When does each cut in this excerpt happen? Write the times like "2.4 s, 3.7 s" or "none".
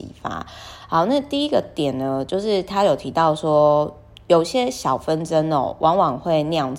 none

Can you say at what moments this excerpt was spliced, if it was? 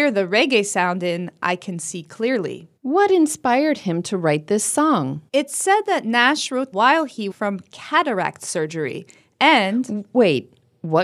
2.8 s, 5.3 s, 6.7 s, 7.3 s

